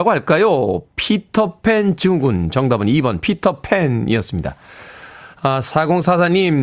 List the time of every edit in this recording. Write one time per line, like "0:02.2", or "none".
0:05.3